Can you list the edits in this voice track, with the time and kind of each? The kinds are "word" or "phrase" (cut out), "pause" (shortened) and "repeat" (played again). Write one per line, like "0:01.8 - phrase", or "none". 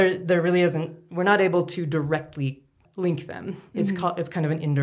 0:02.8 - word